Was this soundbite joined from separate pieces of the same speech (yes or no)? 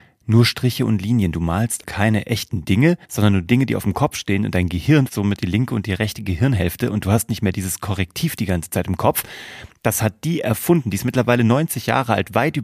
yes